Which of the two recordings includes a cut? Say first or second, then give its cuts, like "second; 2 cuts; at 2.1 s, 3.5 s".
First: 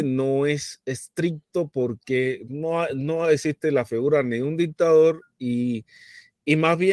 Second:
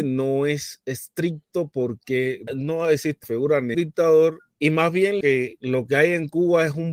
second; 5 cuts; at 2.5 s, 3.2 s, 3.7 s, 4.5 s, 5.2 s